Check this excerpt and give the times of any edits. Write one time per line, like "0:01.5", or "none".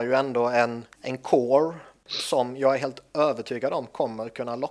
0:00.9
0:02.1